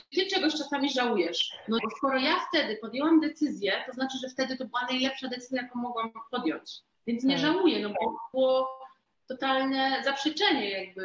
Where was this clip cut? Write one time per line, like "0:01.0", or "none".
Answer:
0:01.8
0:08.3